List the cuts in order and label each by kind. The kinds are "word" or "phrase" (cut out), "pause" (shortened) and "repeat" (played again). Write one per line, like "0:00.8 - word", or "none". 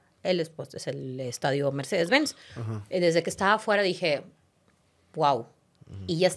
none